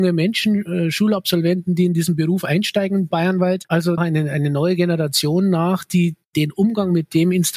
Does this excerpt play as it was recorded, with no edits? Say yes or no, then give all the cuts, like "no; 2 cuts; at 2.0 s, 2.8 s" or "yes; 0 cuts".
no; 2 cuts; at 3.1 s, 4.0 s